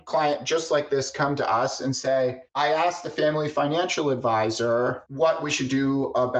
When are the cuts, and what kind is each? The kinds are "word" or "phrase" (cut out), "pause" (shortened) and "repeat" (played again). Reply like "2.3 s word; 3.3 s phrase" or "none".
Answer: 2.5 s pause; 5.1 s pause